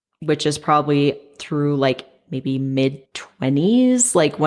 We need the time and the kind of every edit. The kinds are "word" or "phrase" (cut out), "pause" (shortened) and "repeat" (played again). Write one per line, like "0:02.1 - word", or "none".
0:03.1 - pause